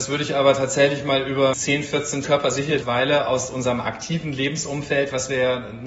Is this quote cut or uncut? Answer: cut